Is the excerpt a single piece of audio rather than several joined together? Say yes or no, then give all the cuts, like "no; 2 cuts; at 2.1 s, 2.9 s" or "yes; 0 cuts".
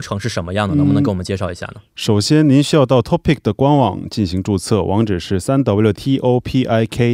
no; 1 cut; at 5.9 s